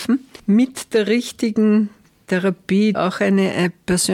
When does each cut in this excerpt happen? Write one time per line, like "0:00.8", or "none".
0:02.9